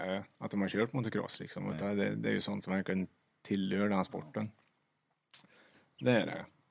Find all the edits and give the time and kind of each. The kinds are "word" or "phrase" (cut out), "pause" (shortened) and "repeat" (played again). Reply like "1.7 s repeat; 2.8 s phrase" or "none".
none